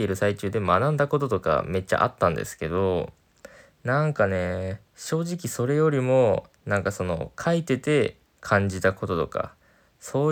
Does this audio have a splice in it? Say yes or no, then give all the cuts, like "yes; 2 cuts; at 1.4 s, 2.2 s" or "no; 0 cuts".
yes; 1 cut; at 4.9 s